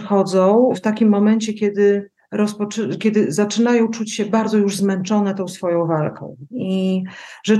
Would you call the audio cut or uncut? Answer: cut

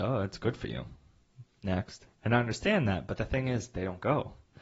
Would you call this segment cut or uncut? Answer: cut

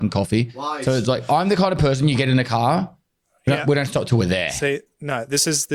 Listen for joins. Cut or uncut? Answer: uncut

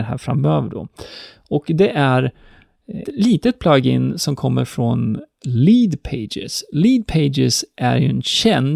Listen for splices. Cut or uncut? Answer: cut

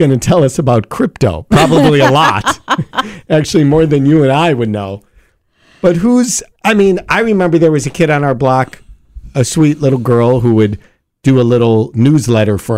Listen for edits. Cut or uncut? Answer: uncut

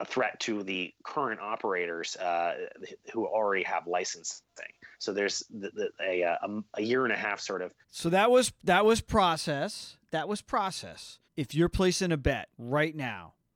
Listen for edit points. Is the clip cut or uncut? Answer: cut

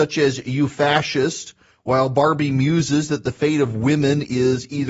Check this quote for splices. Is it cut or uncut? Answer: uncut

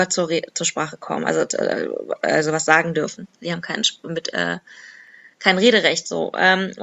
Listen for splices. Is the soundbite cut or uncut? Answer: uncut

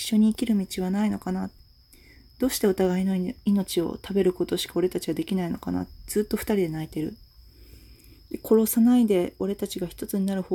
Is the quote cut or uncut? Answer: uncut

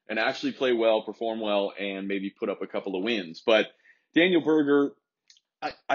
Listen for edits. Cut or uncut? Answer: uncut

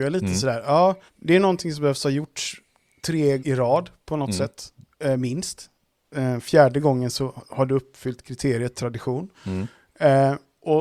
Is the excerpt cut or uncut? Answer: cut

